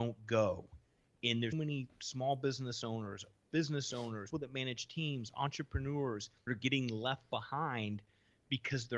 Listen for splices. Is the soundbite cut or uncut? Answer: cut